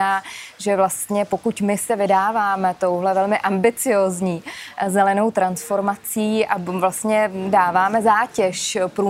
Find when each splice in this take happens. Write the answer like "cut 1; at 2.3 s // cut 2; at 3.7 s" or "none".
none

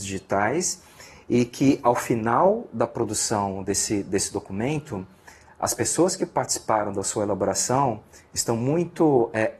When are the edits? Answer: none

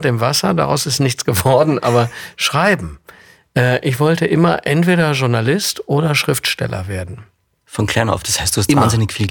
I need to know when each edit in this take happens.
none

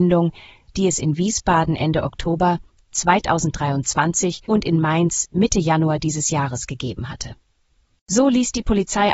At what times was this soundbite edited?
cut 1; at 4.4 s

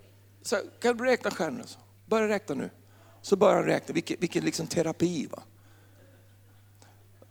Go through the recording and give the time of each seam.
none

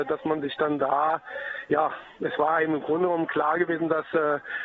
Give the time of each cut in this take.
none

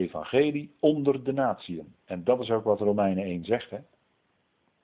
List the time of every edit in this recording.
cut 1; at 2.0 s

